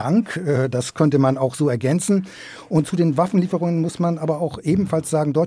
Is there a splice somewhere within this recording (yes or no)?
no